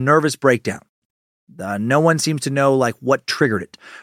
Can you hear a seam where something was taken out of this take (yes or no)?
no